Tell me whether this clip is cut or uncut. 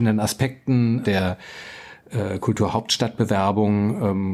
cut